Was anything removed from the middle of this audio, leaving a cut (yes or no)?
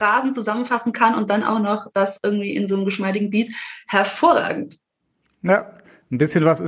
no